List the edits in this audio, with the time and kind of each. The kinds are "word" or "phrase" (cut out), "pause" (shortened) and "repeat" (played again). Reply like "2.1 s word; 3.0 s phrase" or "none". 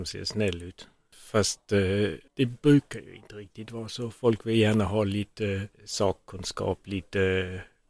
2.3 s pause; 5.7 s pause